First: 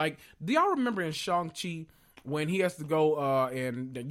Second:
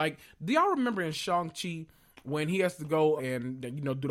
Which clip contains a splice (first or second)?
second